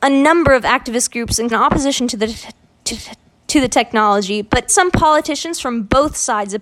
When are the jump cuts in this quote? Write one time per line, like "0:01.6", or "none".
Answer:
0:01.5
0:02.9
0:04.7